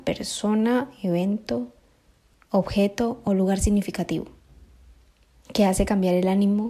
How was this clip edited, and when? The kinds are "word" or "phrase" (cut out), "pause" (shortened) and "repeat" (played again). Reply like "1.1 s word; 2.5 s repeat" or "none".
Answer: none